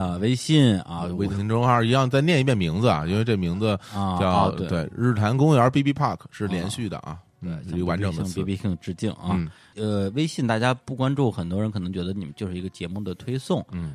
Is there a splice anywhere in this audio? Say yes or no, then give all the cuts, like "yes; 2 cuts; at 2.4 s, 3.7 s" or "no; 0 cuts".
no; 0 cuts